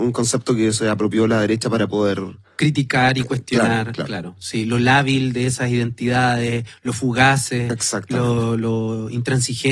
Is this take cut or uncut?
uncut